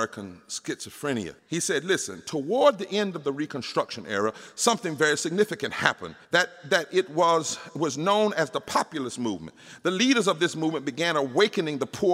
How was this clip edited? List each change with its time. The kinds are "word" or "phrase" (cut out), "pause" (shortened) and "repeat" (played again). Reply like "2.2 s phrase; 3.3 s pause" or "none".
1.4 s pause; 6.2 s pause